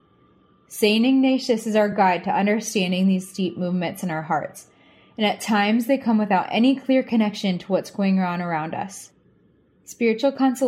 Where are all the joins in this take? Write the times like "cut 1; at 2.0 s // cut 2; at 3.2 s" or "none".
none